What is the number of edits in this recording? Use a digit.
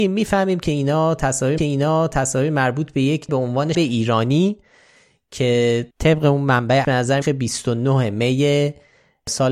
6